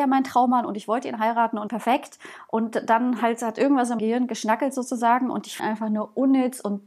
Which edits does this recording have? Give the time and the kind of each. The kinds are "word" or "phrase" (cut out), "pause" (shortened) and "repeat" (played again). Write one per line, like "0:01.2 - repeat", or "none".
0:01.7 - phrase
0:04.0 - word
0:05.6 - phrase